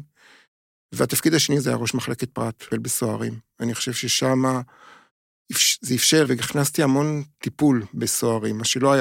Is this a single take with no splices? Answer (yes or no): no